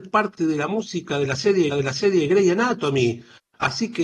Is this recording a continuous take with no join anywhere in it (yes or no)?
no